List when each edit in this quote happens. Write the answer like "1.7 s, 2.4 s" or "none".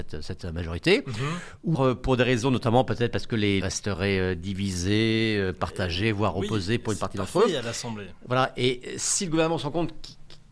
1.7 s, 3.6 s